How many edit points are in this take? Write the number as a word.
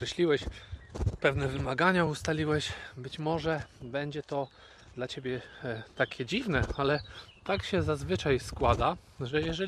zero